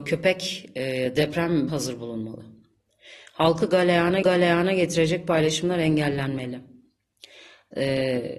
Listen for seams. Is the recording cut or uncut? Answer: cut